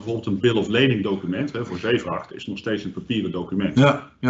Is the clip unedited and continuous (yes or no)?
yes